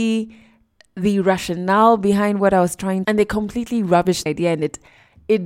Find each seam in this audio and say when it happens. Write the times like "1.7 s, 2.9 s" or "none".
3.0 s, 4.3 s